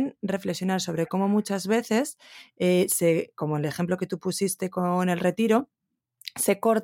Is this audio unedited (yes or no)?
yes